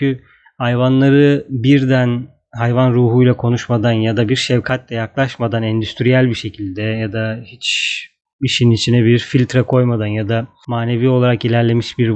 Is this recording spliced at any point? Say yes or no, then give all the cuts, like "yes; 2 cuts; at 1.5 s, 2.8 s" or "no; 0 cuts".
no; 0 cuts